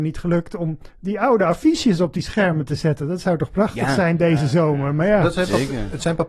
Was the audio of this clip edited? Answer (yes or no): no